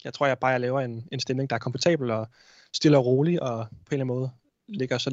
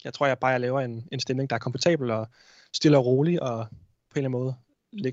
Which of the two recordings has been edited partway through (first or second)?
first